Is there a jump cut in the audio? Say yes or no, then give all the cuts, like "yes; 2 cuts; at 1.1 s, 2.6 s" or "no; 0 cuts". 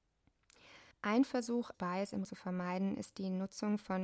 yes; 3 cuts; at 0.9 s, 1.7 s, 2.2 s